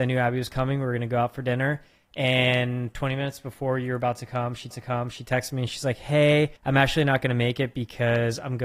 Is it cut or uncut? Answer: cut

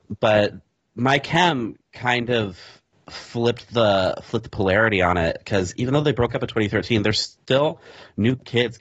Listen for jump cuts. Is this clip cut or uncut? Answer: uncut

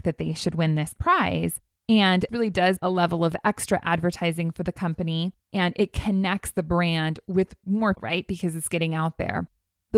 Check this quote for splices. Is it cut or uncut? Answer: cut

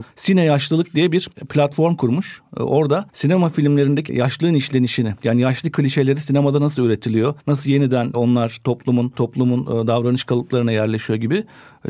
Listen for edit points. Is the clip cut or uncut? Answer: cut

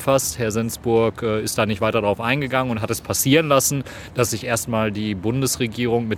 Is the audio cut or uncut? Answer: uncut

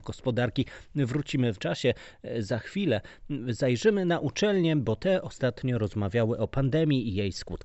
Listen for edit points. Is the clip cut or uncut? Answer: cut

